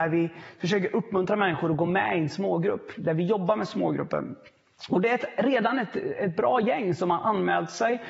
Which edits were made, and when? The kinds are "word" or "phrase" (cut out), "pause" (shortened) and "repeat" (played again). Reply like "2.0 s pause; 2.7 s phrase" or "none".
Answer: none